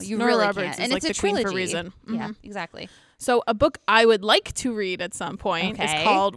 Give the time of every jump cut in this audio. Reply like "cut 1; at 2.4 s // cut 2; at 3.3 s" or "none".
none